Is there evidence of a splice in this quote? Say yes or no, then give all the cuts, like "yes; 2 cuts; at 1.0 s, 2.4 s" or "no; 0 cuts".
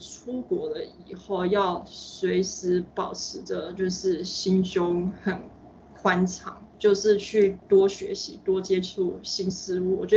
yes; 1 cut; at 6.7 s